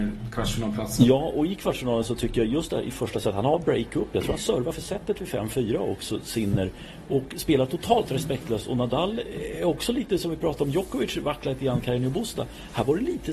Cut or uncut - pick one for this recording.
uncut